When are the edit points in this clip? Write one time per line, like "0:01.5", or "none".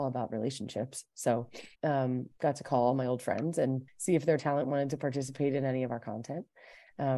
0:01.8
0:03.9